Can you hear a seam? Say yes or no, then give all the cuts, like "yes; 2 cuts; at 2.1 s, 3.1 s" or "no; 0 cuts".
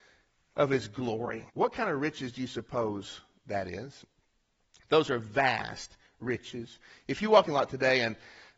yes; 2 cuts; at 1.5 s, 7.5 s